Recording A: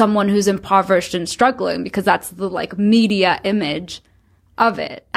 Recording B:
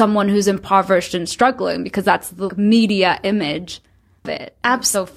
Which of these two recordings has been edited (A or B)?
B